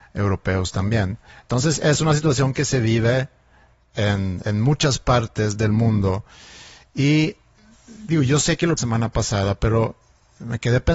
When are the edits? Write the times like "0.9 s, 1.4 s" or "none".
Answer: 1.3 s, 4.4 s, 8.8 s